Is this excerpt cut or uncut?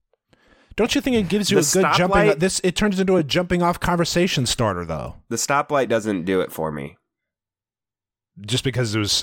uncut